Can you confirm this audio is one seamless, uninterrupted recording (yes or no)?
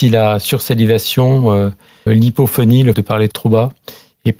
no